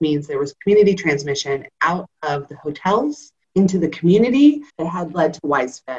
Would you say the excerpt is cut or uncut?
cut